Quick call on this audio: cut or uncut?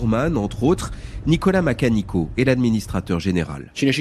uncut